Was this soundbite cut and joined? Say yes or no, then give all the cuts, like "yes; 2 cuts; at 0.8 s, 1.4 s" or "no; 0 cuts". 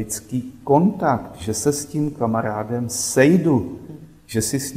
no; 0 cuts